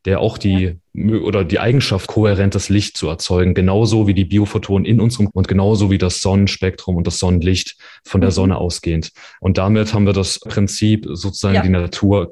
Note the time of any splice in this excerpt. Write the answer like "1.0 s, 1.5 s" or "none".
2.1 s, 5.3 s, 10.5 s